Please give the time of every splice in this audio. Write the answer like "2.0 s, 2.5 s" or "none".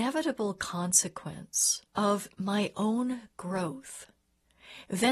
1.9 s